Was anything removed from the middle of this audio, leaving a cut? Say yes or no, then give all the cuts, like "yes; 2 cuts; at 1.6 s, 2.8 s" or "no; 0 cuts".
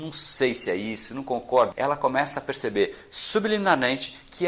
yes; 1 cut; at 1.7 s